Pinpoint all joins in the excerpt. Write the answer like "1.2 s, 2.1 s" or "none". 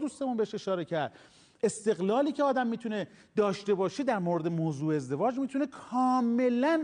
none